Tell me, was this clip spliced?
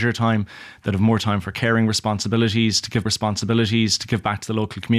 yes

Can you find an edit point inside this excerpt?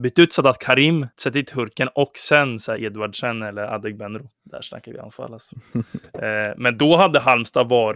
yes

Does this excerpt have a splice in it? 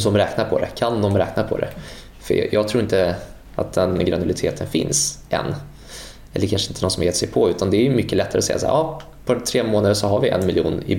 no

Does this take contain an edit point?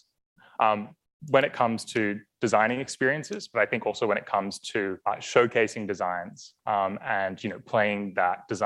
yes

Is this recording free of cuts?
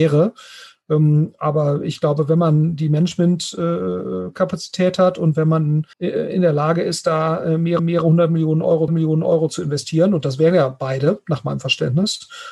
no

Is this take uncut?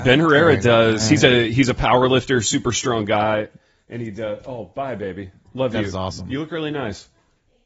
yes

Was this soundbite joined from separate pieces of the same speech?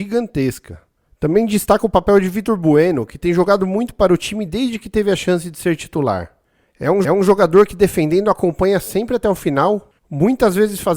yes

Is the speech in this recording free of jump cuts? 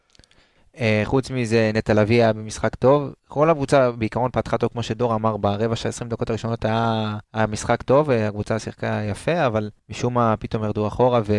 no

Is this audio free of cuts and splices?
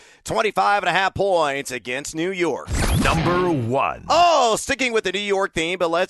yes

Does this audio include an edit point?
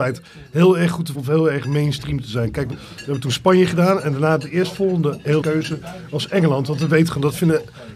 yes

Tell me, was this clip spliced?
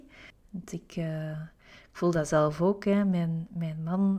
no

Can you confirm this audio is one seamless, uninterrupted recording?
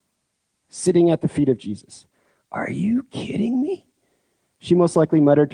yes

